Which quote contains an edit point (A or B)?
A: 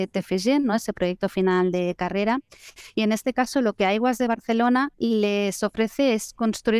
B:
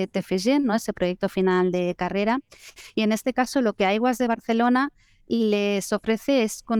A